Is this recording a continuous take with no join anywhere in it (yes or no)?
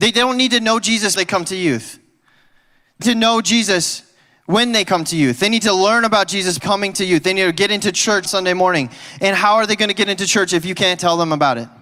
no